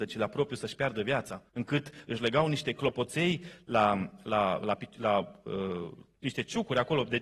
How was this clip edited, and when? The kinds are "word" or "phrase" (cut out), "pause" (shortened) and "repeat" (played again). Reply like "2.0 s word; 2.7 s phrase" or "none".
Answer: 1.5 s pause